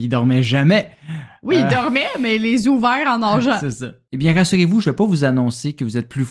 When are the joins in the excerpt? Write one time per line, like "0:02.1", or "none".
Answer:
none